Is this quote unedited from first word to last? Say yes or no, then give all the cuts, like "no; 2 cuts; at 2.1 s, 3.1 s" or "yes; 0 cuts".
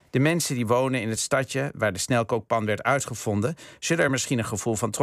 yes; 0 cuts